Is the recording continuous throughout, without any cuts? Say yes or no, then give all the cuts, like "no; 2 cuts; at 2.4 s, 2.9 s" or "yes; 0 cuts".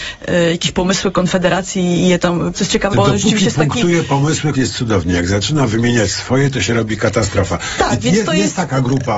no; 3 cuts; at 2.5 s, 2.9 s, 4.5 s